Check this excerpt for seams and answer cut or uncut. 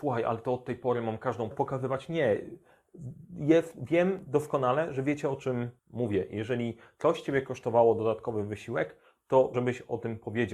cut